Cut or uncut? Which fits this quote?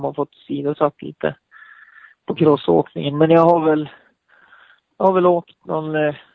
uncut